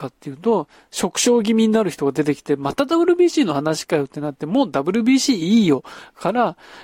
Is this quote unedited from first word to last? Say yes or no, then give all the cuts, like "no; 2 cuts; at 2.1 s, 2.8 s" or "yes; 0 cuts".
yes; 0 cuts